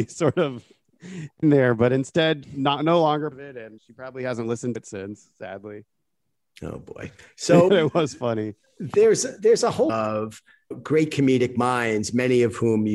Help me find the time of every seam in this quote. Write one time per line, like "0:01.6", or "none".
0:01.4
0:02.4
0:03.3
0:03.8
0:04.8
0:07.7
0:09.9
0:10.7